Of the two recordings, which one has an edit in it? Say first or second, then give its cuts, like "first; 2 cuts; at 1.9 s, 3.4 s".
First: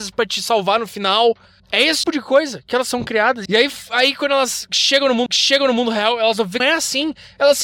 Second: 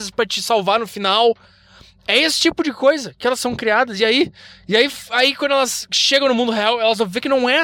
first; 5 cuts; at 1.6 s, 2.0 s, 3.5 s, 5.3 s, 6.6 s